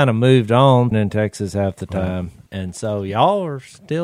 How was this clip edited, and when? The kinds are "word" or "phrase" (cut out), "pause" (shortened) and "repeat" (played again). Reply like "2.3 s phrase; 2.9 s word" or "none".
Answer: 0.9 s phrase; 2.5 s pause